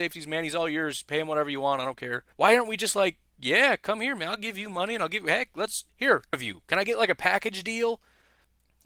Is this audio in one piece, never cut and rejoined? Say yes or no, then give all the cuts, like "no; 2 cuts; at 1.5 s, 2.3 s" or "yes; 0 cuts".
no; 3 cuts; at 2.3 s, 5.9 s, 6.3 s